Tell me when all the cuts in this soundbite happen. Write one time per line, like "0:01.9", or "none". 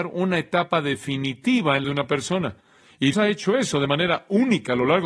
0:01.8
0:03.1